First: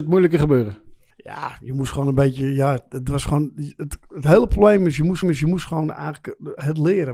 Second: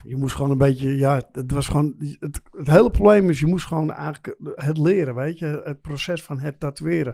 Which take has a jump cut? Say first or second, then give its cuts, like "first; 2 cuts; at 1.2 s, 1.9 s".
first; 2 cuts; at 1.1 s, 5.2 s